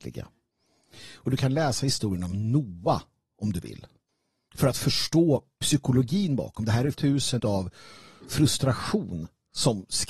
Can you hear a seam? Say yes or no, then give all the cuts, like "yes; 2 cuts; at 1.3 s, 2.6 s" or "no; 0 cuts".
yes; 2 cuts; at 6.9 s, 7.4 s